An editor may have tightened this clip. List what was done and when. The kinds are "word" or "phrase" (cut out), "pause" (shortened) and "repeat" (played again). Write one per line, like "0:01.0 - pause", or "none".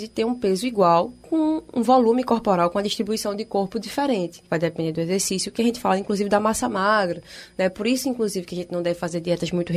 0:04.5 - pause